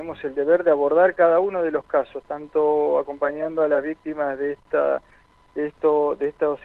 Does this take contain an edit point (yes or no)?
no